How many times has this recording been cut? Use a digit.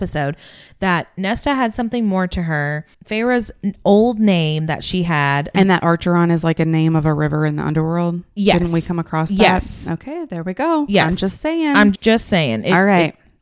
2